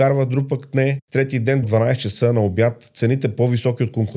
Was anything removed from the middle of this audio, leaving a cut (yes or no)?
yes